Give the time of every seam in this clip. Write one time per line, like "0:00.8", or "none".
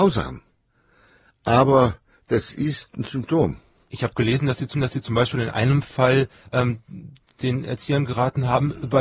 0:04.7